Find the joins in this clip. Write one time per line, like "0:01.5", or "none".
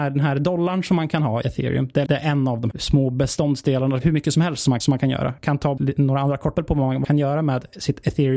0:01.4
0:02.1
0:02.7
0:04.0
0:04.8
0:05.8
0:06.5
0:07.0